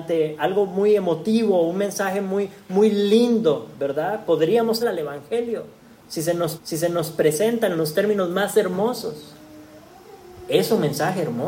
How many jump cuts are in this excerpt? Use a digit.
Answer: 2